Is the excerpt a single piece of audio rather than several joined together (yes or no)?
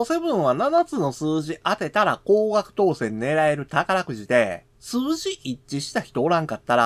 no